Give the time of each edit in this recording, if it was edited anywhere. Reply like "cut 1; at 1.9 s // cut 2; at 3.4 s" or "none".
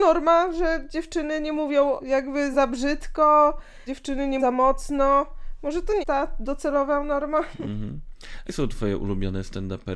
cut 1; at 2.0 s // cut 2; at 2.5 s // cut 3; at 3.9 s // cut 4; at 4.4 s // cut 5; at 6.0 s // cut 6; at 8.4 s